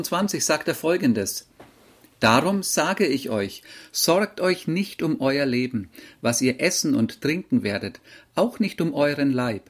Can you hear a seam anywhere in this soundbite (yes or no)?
no